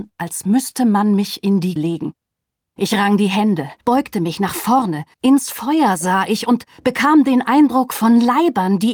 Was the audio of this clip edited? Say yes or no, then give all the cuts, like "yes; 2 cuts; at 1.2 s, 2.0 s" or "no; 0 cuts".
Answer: yes; 3 cuts; at 1.8 s, 3.8 s, 5.1 s